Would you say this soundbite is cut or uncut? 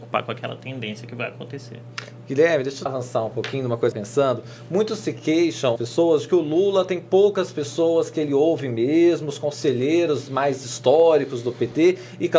cut